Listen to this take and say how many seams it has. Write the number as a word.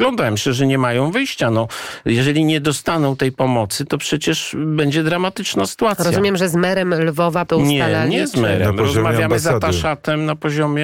one